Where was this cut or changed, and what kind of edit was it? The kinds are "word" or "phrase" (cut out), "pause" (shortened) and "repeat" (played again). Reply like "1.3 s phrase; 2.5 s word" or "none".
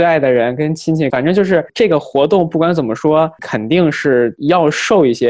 1.1 s phrase; 1.7 s pause